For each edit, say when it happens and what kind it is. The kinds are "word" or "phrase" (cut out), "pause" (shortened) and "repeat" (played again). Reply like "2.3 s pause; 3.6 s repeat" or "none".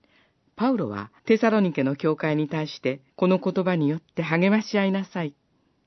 1.2 s pause; 3.1 s pause